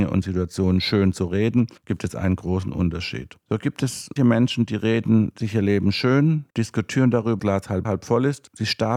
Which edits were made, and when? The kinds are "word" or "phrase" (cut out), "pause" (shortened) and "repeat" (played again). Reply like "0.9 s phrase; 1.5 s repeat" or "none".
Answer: 1.8 s pause; 4.2 s word; 6.5 s pause; 7.4 s phrase; 7.8 s word

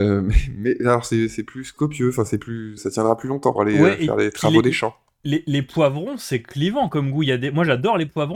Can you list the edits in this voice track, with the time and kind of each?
2.8 s word; 3.6 s word

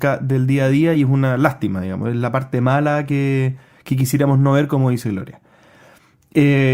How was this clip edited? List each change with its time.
none

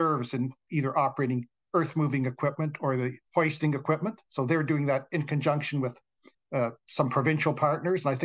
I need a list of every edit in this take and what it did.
4.2 s pause

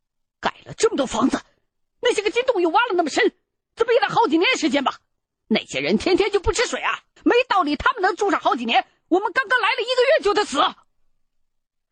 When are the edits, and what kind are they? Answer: 7.2 s pause

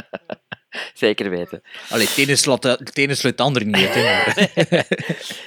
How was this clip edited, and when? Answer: none

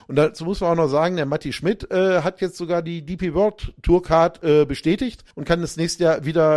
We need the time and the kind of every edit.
5.3 s pause

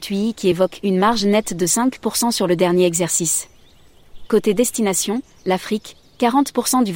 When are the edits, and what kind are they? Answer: none

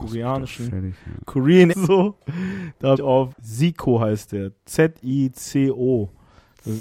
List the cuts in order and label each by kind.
1.7 s word; 3.0 s phrase; 3.3 s word

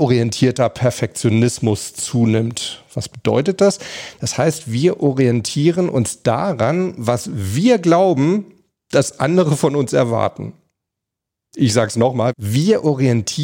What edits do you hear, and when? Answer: none

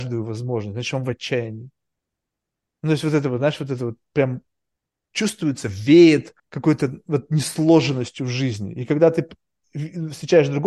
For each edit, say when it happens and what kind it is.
6.4 s pause

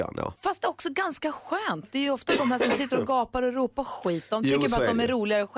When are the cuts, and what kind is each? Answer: 1.8 s word

